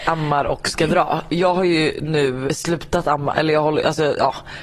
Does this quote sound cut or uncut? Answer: cut